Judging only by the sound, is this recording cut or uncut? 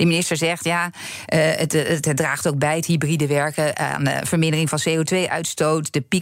uncut